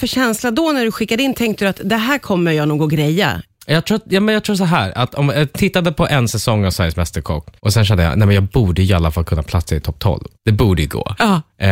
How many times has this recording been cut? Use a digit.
3